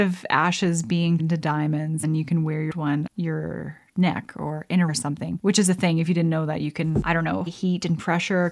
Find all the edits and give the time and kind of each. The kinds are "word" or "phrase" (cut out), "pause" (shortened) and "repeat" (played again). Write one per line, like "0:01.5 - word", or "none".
0:01.2 - word
0:02.0 - word
0:02.7 - word
0:03.1 - word
0:04.9 - word
0:07.5 - word